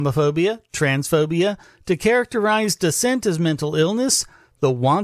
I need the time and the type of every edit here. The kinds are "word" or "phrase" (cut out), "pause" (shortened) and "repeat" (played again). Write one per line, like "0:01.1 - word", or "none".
none